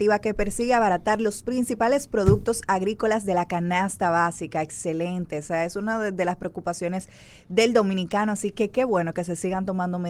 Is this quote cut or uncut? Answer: uncut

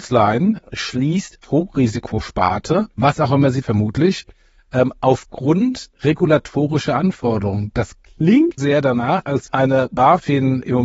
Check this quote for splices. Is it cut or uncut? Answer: cut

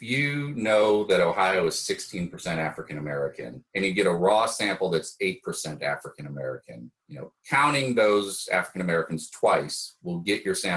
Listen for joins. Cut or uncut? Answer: cut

